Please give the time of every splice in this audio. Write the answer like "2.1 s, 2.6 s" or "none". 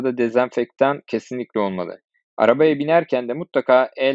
none

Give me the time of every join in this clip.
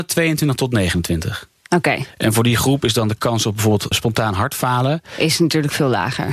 3.9 s

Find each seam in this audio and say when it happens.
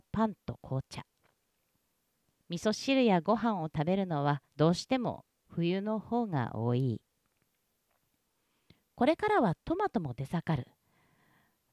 4.5 s

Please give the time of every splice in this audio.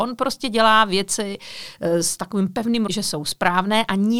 2.9 s

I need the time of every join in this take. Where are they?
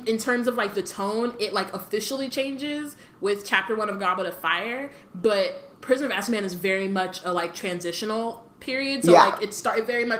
5.7 s, 8.5 s

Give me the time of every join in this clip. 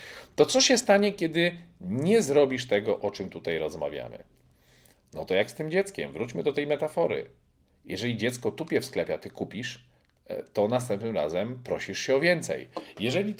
none

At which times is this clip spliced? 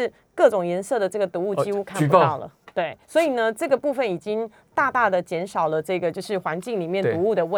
3.0 s

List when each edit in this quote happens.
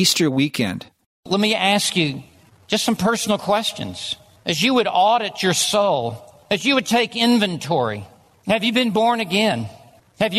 none

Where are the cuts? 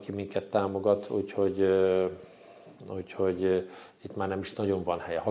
none

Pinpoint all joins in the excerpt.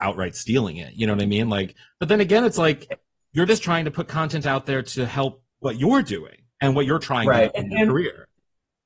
none

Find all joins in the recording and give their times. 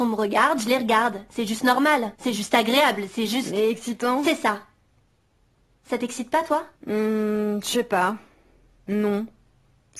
2.1 s, 6.7 s

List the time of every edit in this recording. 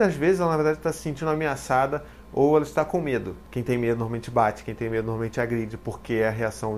none

